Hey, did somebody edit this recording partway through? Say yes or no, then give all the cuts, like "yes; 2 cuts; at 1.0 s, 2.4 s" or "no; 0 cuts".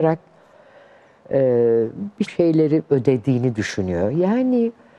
yes; 1 cut; at 2.3 s